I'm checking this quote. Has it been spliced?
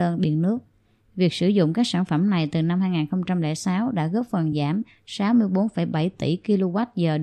no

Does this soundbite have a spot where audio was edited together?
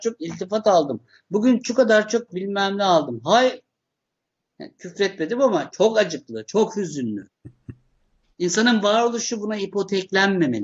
no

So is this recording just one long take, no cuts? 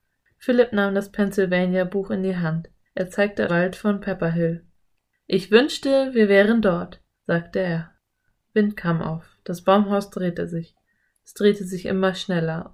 no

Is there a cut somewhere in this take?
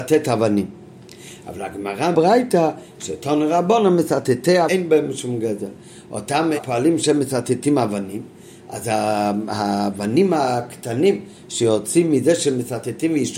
yes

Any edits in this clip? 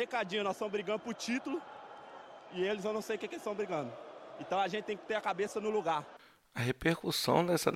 no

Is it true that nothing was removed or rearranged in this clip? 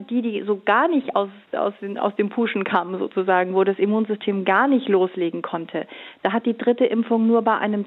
yes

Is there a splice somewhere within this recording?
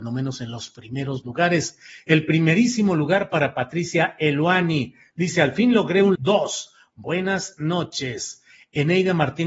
yes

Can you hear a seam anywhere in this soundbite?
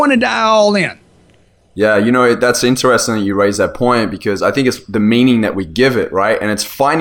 no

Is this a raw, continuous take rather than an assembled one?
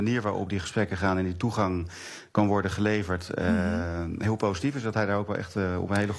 yes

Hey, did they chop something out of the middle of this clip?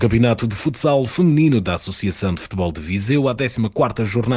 no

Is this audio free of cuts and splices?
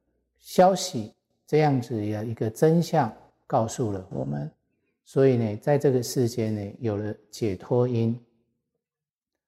yes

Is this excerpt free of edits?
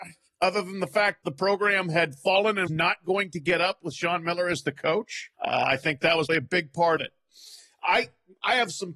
no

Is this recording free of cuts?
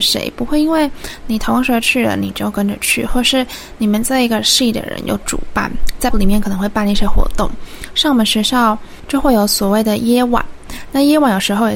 no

